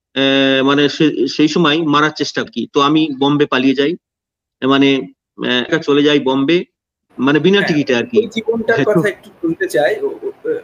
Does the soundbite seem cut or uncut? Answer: cut